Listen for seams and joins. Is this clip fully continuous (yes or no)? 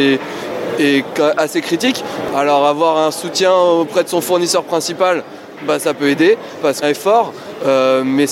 no